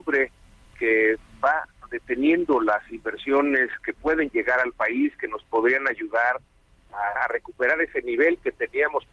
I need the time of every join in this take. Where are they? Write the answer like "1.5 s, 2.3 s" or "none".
7.2 s